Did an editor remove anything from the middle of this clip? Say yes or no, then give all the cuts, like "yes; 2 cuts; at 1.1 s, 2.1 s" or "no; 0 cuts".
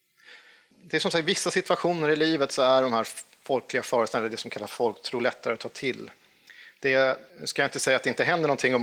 yes; 1 cut; at 7.3 s